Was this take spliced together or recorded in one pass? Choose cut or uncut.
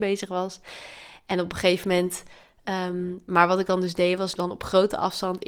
cut